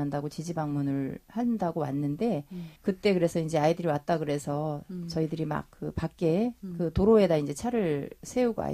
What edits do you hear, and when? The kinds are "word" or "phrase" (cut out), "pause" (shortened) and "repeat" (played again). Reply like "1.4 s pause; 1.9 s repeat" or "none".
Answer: 2.8 s pause; 5.7 s pause